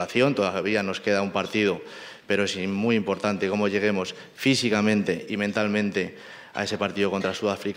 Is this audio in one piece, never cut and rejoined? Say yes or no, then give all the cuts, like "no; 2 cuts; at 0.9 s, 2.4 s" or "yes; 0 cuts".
yes; 0 cuts